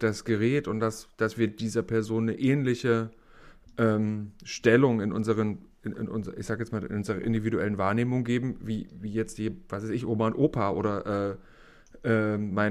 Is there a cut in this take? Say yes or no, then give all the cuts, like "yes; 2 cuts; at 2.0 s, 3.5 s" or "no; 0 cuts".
no; 0 cuts